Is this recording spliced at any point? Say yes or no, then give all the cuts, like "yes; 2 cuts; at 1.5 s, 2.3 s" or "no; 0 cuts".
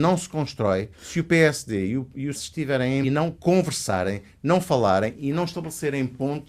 yes; 3 cuts; at 0.9 s, 2.3 s, 3.0 s